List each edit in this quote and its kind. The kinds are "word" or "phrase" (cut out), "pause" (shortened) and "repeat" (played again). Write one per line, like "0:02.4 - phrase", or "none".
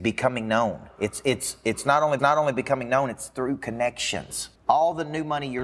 0:02.2 - repeat
0:04.6 - pause